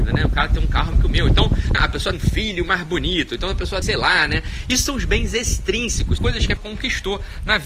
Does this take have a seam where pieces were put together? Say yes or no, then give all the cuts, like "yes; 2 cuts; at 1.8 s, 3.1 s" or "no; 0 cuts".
yes; 6 cuts; at 0.9 s, 1.7 s, 2.1 s, 3.8 s, 6.2 s, 6.6 s